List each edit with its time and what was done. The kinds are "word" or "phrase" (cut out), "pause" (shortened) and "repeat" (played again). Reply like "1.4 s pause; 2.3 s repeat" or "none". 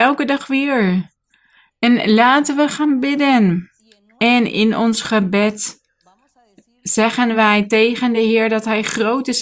none